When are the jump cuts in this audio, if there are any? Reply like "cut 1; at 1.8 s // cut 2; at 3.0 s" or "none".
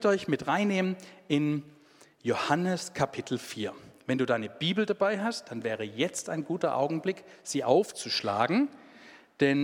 none